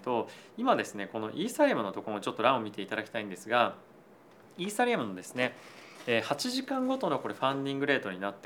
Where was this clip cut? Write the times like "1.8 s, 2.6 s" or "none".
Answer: none